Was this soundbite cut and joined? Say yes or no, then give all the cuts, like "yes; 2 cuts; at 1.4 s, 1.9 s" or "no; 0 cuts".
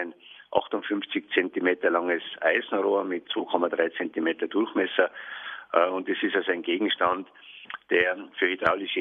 no; 0 cuts